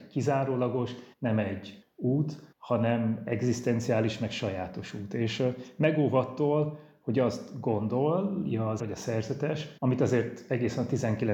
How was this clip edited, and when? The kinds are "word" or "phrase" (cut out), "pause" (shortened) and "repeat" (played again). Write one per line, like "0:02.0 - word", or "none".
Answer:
0:01.1 - pause
0:01.8 - word
0:02.5 - pause
0:08.8 - word
0:09.8 - pause